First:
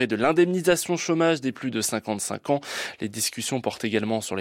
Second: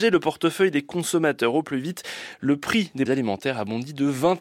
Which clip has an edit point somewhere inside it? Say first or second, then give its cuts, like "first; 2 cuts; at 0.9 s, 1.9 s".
second; 1 cut; at 3.1 s